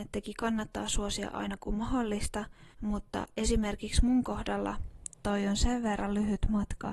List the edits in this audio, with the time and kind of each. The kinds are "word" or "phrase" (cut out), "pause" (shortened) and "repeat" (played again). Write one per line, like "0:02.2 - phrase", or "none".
0:02.7 - pause